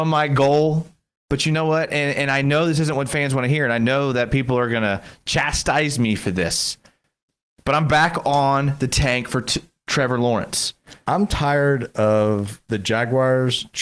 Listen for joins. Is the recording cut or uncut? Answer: uncut